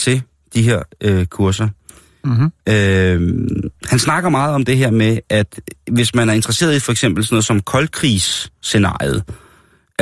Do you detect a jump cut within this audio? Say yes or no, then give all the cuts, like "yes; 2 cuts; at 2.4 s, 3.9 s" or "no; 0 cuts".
no; 0 cuts